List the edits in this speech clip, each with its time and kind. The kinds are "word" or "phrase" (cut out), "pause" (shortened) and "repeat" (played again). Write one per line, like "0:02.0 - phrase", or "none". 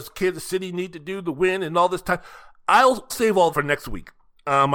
0:03.1 - word
0:03.5 - word